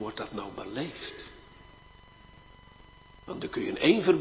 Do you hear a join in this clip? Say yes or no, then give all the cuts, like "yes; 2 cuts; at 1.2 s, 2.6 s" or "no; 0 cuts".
no; 0 cuts